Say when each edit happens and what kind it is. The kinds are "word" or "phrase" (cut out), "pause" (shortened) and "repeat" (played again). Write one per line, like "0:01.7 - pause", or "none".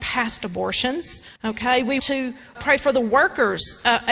0:01.4 - pause
0:02.0 - word
0:02.5 - word